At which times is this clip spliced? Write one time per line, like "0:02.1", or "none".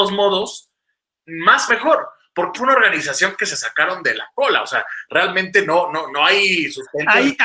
0:01.7
0:02.5